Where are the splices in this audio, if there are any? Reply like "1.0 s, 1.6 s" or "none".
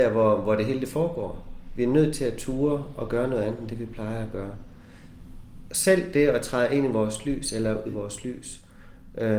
7.9 s

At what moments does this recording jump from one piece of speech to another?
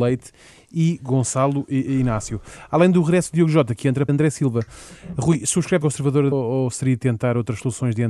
4.1 s, 5.8 s, 6.3 s

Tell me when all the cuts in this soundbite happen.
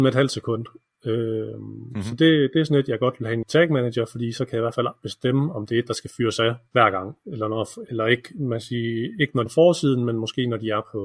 3.4 s, 7.9 s, 9.5 s

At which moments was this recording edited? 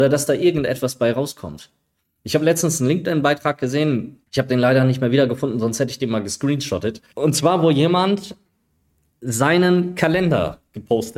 4.2 s, 7.1 s

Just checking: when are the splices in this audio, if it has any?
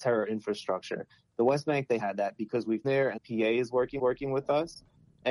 2.0 s, 2.8 s, 3.2 s, 4.0 s

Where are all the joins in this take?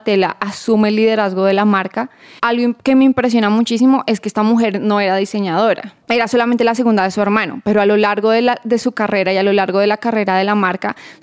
2.4 s, 6.0 s

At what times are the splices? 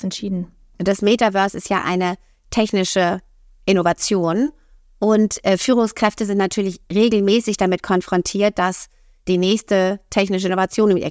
none

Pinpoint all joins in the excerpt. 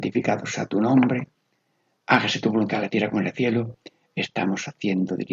none

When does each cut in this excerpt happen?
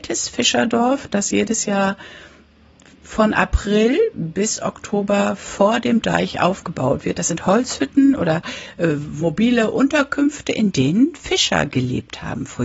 none

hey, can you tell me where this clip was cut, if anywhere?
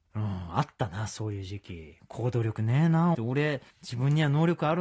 3.1 s, 3.7 s

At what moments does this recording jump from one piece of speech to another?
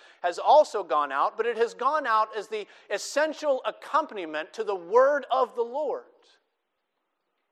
none

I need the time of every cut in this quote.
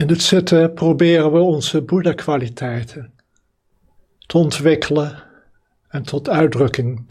none

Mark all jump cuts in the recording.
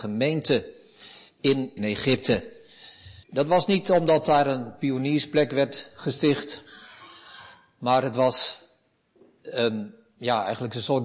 1.8 s, 3.2 s

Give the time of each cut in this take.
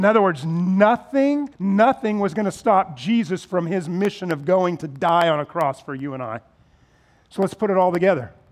1.5 s

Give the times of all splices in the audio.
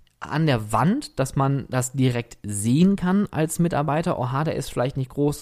none

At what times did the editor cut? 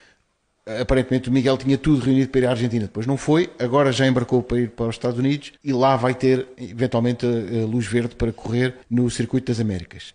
5.6 s, 8.8 s

